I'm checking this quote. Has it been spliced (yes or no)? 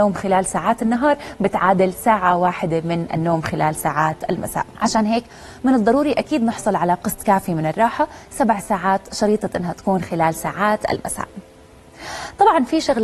yes